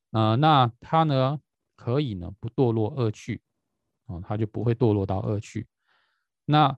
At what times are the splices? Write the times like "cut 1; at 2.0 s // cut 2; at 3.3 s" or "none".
none